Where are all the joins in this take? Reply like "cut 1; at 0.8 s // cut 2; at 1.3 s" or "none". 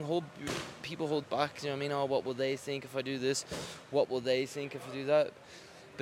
cut 1; at 1.2 s

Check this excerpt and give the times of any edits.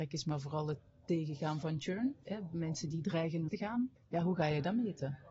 cut 1; at 3.5 s // cut 2; at 4.0 s

